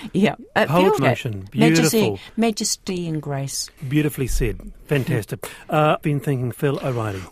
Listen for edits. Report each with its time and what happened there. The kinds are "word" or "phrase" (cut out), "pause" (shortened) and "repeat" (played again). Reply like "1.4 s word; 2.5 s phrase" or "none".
1.0 s phrase; 3.8 s pause; 6.0 s word